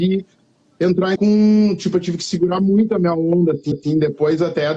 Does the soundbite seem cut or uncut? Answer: cut